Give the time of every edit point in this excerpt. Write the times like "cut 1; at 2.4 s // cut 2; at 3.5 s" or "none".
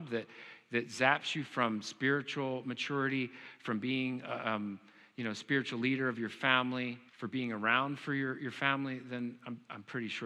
cut 1; at 7.1 s